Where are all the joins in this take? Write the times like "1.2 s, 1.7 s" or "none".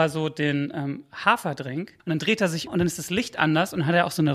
2.0 s, 2.7 s